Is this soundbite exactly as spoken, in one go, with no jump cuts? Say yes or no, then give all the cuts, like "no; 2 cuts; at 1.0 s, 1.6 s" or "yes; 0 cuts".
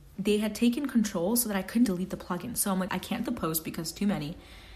no; 3 cuts; at 1.9 s, 2.9 s, 3.3 s